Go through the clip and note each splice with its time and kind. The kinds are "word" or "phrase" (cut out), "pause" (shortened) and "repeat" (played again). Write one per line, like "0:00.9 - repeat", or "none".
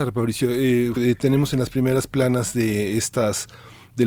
0:01.0 - word